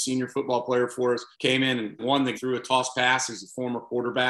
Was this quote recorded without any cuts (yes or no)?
no